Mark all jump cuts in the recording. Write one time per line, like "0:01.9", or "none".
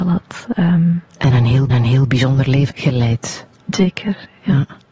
0:01.1
0:01.7
0:02.7